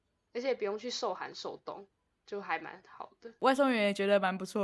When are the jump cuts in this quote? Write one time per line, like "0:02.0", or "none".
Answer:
none